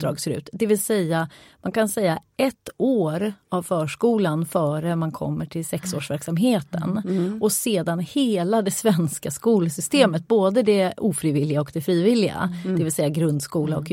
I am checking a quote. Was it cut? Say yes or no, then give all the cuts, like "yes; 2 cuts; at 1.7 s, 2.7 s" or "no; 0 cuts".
no; 0 cuts